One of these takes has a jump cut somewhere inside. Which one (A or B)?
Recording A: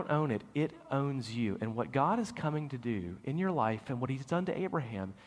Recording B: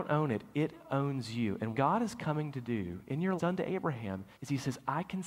B